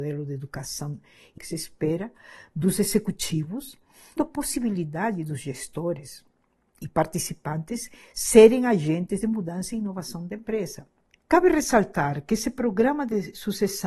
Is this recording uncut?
no; 2 cuts; at 1.4 s, 4.2 s

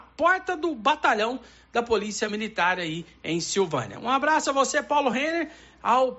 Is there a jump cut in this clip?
no; 0 cuts

